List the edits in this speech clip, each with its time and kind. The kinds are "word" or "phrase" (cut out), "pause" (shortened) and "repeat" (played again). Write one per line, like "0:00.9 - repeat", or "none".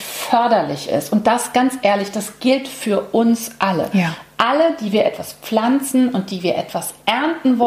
none

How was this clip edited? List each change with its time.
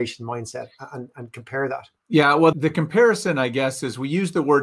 0:02.0 - pause
0:02.5 - word

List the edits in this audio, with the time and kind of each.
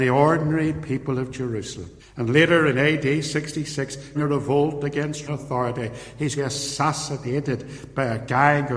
0:02.0 - pause
0:04.1 - word
0:05.3 - word
0:06.4 - phrase

